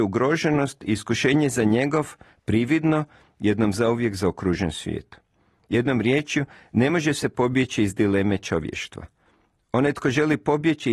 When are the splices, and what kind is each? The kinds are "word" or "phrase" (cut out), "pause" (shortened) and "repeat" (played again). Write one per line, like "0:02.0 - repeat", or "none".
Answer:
none